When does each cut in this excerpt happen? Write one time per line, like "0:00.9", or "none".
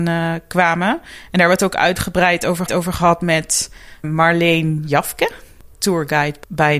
0:02.7
0:04.0
0:05.7